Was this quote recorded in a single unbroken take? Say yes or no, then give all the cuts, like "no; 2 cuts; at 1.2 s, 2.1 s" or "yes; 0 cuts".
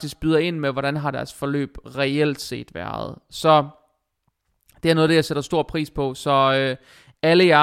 yes; 0 cuts